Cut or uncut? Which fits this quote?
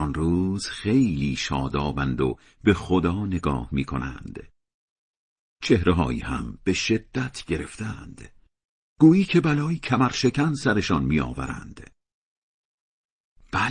uncut